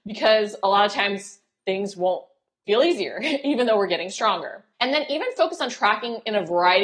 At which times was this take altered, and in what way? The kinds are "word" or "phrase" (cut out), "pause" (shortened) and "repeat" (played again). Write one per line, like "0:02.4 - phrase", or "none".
0:04.7 - pause